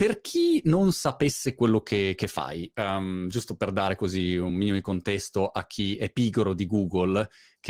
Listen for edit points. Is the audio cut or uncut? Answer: uncut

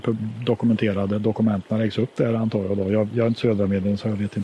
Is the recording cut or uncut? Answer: uncut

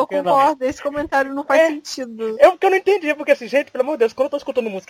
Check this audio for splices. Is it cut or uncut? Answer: uncut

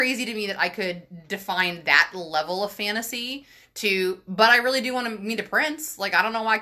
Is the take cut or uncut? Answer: uncut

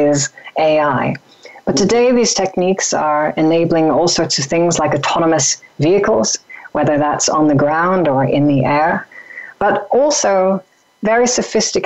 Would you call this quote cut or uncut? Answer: uncut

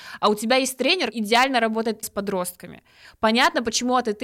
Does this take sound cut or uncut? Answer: cut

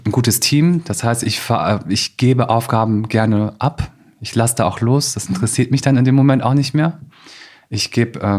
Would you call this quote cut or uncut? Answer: uncut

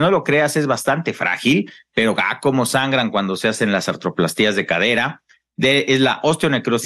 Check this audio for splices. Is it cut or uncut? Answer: uncut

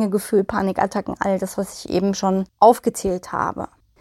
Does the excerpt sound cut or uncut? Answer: uncut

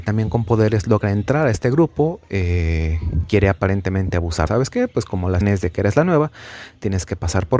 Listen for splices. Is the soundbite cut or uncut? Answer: cut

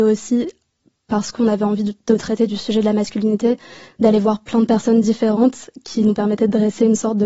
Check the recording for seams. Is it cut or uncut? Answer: uncut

